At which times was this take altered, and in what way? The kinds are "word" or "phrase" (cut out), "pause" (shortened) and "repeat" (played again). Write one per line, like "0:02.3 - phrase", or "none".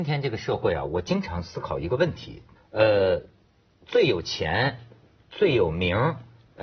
0:02.5 - phrase